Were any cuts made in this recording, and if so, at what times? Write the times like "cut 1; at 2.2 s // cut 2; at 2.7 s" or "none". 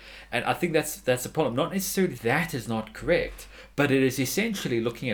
cut 1; at 2.2 s